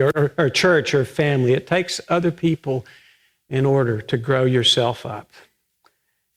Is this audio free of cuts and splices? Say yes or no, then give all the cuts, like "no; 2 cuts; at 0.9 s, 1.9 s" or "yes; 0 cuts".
yes; 0 cuts